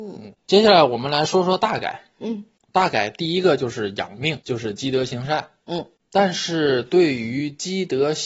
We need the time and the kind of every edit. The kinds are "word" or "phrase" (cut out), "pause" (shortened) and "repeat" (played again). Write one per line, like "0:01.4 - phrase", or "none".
0:04.4 - pause